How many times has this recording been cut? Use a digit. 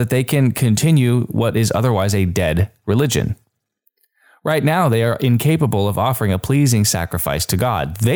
0